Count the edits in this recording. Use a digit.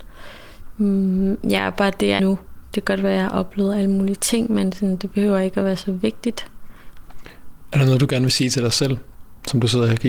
1